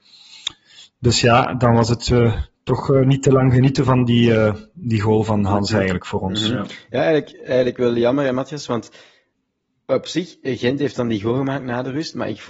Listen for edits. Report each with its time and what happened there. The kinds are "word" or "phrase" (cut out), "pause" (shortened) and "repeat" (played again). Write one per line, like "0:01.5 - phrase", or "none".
none

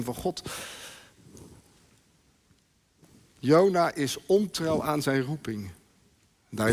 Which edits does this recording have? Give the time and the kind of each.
none

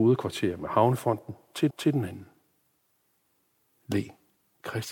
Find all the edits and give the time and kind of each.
0:01.7 - repeat

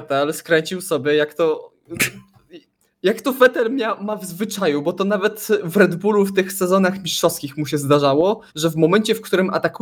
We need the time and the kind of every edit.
0:08.5 - pause

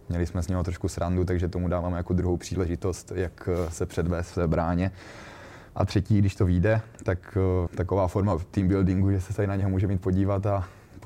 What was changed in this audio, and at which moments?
0:05.7 - pause
0:07.7 - word

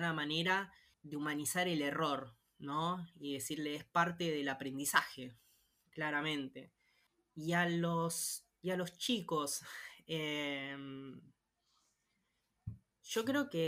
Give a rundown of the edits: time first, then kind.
none

